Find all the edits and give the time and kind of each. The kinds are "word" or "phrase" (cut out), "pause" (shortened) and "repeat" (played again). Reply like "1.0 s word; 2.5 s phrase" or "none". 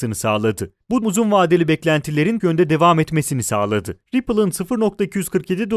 1.0 s word; 2.4 s word; 4.0 s pause

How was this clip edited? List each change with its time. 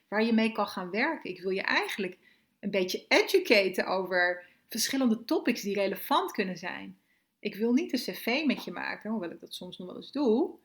none

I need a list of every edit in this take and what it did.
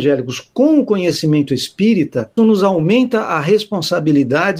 2.4 s word

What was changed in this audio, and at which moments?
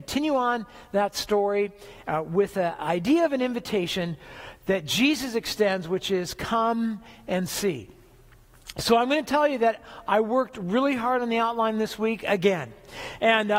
none

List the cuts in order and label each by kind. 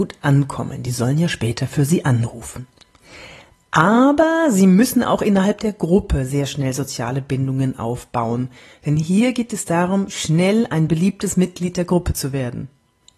none

